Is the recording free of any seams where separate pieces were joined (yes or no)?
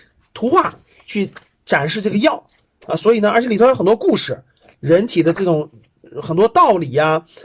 yes